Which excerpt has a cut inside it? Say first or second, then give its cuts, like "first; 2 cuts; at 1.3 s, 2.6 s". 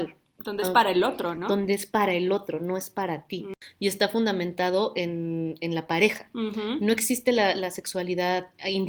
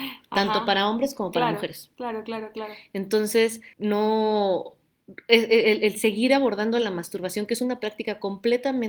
second; 1 cut; at 3.7 s